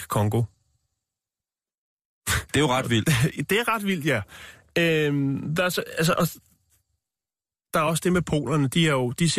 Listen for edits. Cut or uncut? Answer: cut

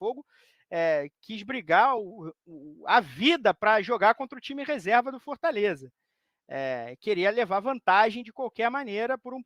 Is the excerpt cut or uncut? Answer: uncut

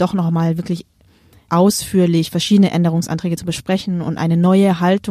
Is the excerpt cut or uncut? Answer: cut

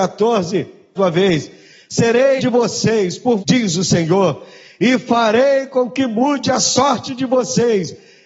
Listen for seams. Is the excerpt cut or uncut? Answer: cut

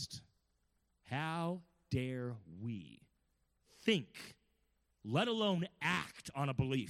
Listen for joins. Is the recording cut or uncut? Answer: uncut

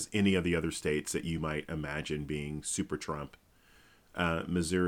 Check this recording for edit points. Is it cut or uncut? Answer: uncut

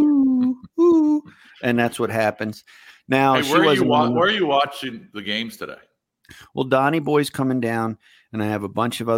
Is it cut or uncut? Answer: uncut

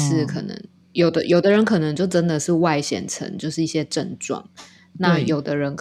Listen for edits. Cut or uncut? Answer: uncut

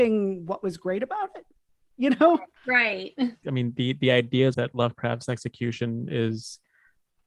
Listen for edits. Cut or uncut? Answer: cut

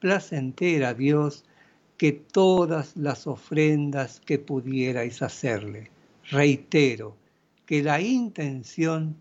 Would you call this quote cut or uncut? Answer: uncut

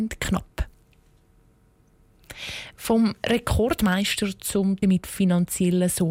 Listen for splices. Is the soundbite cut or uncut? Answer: cut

